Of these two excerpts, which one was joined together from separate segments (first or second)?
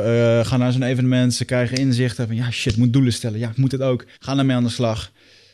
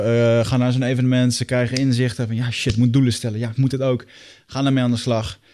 first